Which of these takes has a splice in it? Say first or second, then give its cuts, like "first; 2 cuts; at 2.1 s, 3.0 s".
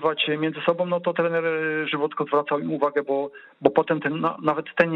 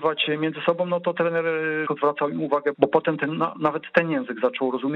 second; 2 cuts; at 1.9 s, 2.7 s